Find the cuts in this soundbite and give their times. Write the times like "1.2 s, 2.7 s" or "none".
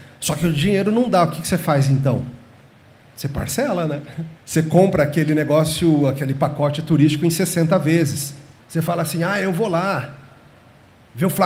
2.7 s, 4.4 s, 8.6 s